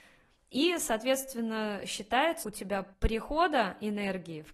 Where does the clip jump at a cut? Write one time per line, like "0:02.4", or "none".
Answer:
0:02.4
0:02.9

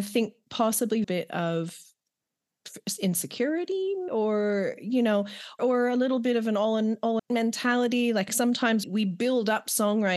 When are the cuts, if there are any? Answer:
0:01.0
0:04.1
0:05.6
0:07.2
0:08.3
0:08.8

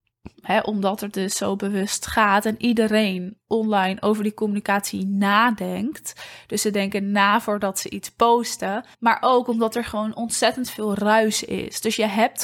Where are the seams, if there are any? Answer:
0:08.9

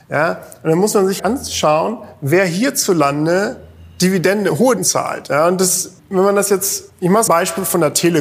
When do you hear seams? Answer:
0:01.2
0:04.8
0:06.0
0:06.9
0:07.3

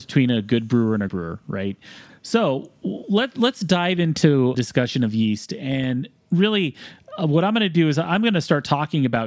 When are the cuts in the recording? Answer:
0:01.1
0:02.1
0:04.5

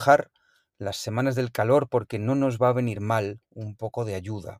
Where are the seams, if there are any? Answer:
none

